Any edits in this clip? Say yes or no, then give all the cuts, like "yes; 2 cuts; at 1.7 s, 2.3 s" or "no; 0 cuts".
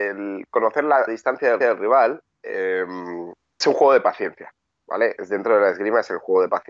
yes; 3 cuts; at 1.1 s, 1.6 s, 3.6 s